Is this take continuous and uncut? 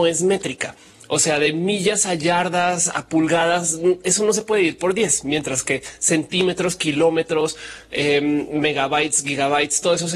yes; 0 cuts

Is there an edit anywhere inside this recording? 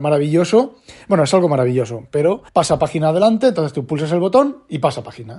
yes; 1 cut; at 2.5 s

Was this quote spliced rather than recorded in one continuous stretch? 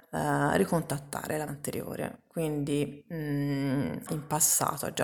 yes; 2 cuts; at 1.5 s, 4.1 s

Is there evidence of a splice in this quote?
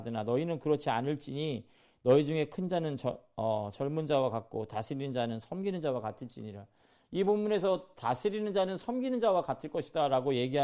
no; 0 cuts

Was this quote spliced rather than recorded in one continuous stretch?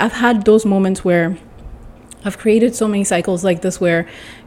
yes; 1 cut; at 2.0 s

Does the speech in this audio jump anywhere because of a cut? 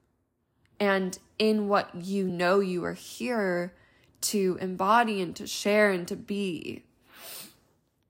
no; 0 cuts

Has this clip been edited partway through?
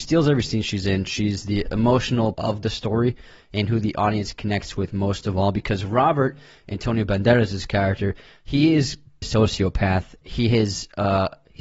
yes; 3 cuts; at 2.3 s, 9.2 s, 10.2 s

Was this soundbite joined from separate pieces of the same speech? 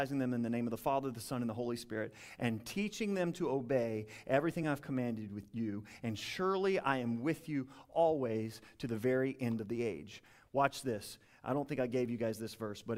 no; 0 cuts

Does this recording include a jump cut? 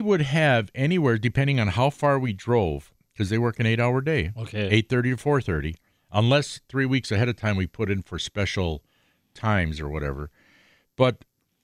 no; 0 cuts

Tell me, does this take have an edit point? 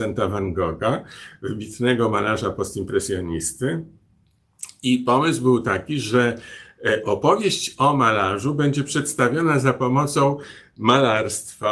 no; 0 cuts

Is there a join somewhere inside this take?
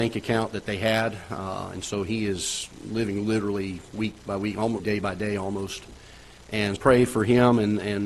yes; 2 cuts; at 4.8 s, 6.8 s

